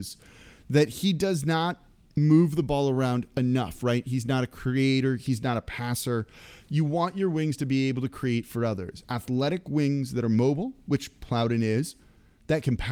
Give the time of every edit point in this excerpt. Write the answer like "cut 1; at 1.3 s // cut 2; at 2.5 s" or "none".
none